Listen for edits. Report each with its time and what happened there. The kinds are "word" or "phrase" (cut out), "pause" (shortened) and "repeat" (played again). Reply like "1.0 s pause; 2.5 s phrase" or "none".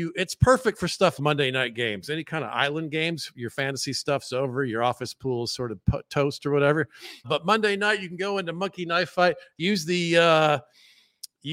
1.2 s word; 7.2 s word